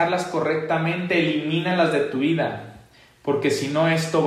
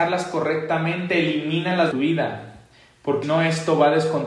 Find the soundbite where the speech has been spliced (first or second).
second